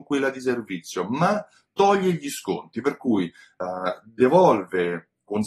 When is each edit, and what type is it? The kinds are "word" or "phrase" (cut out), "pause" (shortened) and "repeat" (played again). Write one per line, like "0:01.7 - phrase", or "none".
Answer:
none

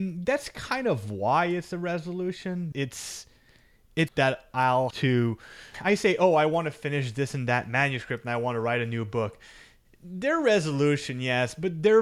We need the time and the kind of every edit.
0:02.7 - word
0:04.1 - word
0:04.9 - word
0:05.7 - word

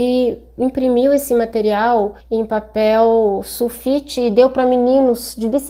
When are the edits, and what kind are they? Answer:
0:02.2 - pause

